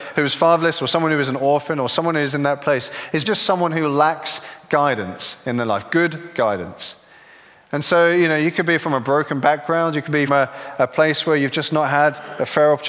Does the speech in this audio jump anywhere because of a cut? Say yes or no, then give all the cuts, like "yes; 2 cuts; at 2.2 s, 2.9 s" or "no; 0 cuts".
yes; 2 cuts; at 3.2 s, 10.3 s